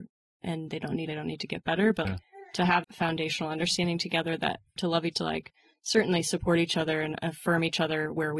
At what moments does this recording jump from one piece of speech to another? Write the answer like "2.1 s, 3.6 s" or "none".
1.1 s, 2.0 s, 2.8 s, 4.8 s, 5.1 s